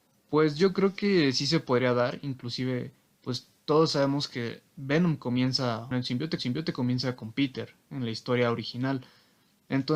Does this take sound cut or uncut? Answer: cut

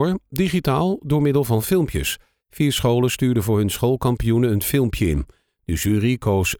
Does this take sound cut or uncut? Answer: uncut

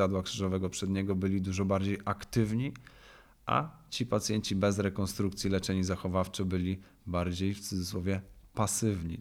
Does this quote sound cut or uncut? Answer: uncut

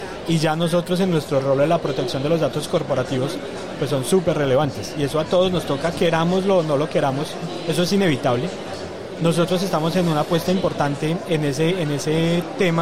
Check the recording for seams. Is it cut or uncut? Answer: uncut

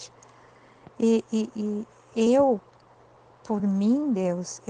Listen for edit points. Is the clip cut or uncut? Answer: uncut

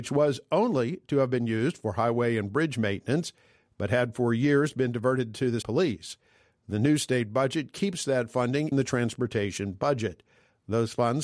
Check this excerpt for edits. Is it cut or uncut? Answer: cut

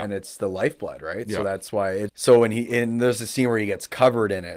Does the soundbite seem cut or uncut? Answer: cut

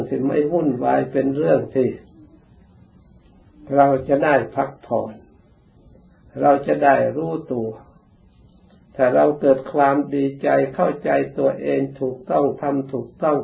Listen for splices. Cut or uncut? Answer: uncut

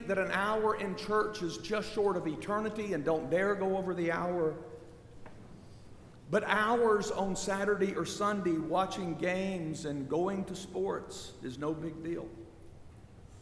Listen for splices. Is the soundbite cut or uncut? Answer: uncut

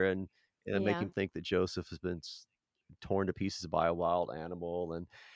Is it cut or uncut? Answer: uncut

